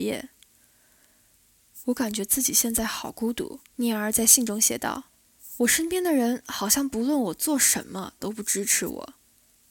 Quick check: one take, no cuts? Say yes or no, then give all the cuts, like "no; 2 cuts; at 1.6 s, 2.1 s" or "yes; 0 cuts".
no; 2 cuts; at 3.7 s, 5.1 s